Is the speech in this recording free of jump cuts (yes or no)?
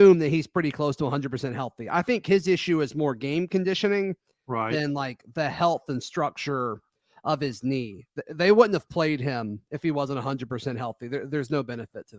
yes